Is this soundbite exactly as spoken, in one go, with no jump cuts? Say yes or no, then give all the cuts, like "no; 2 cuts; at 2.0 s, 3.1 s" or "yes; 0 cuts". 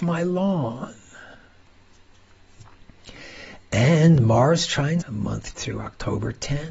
no; 2 cuts; at 5.0 s, 5.5 s